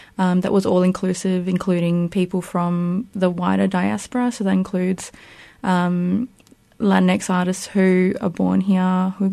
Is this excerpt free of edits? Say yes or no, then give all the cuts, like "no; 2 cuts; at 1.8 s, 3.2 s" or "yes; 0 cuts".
yes; 0 cuts